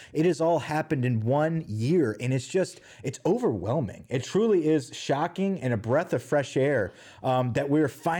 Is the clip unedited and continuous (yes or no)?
yes